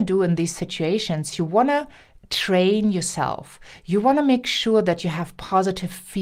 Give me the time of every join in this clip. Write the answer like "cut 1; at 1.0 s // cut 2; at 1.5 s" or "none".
none